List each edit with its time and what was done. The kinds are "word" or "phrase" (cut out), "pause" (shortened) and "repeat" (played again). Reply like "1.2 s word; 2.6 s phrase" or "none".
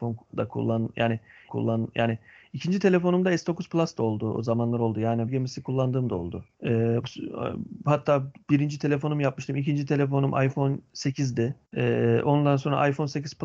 1.5 s repeat; 5.3 s phrase; 6.5 s pause; 8.4 s pause; 11.6 s pause